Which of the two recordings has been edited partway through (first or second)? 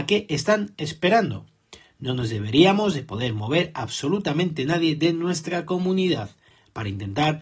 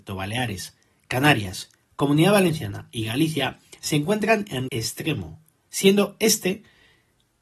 second